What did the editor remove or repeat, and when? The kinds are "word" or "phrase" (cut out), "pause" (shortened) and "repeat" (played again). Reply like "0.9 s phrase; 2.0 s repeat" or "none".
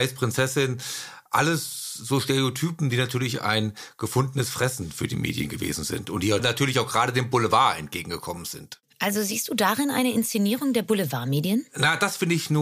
none